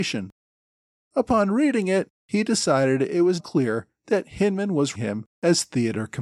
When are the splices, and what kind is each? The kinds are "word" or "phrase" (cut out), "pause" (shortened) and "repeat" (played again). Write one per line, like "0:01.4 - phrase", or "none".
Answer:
0:03.4 - word
0:04.9 - word